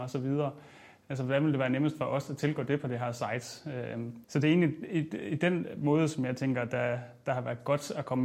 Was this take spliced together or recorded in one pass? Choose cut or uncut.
cut